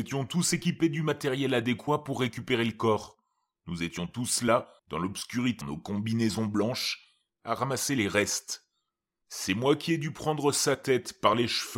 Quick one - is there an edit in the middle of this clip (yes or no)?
yes